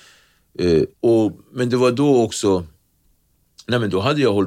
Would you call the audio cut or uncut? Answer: cut